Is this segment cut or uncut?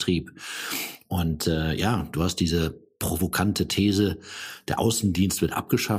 uncut